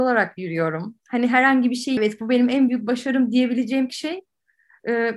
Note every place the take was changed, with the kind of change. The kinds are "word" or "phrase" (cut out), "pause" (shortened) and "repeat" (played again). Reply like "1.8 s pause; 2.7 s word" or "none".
2.0 s phrase; 3.9 s word

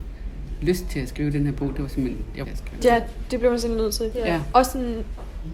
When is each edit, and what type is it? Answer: 2.4 s phrase

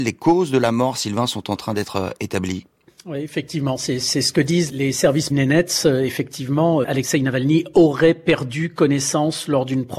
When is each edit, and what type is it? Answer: 2.8 s pause; 4.7 s word; 5.3 s phrase; 6.8 s word

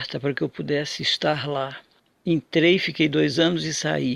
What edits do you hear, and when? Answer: none

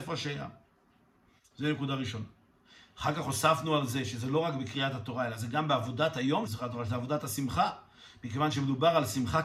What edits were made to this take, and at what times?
6.4 s phrase

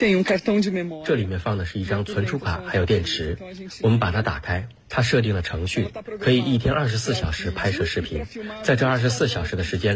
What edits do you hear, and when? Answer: 4.8 s pause

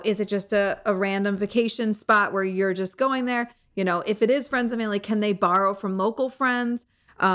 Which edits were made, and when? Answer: none

